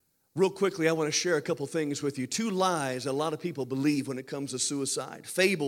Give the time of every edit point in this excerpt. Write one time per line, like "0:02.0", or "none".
none